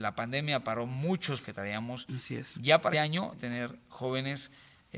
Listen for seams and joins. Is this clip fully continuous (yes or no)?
no